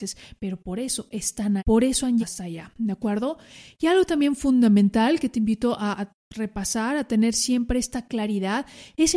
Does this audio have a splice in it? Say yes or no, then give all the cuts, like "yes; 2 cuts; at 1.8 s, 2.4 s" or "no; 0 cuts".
yes; 3 cuts; at 1.6 s, 2.2 s, 5.9 s